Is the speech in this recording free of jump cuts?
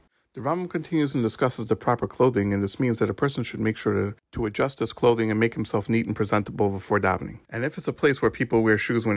no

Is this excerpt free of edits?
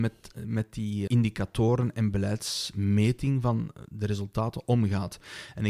no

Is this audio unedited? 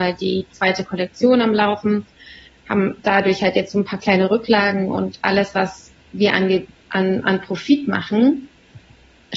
yes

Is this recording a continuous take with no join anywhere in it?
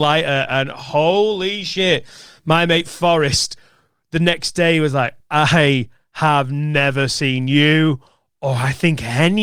yes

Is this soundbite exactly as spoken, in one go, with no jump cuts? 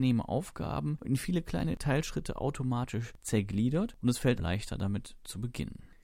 no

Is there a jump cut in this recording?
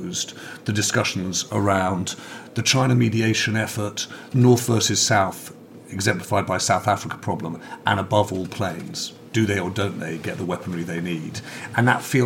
yes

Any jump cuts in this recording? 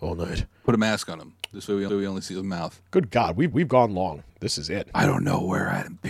yes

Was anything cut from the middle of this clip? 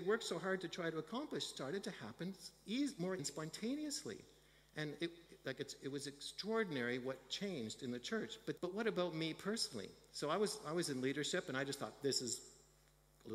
yes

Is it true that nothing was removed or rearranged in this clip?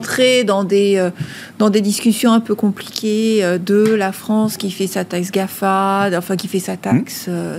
yes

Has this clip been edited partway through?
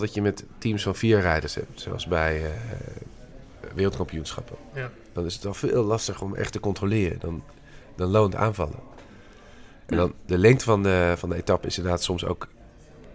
no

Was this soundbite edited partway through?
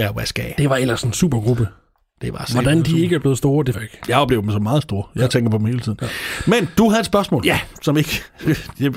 yes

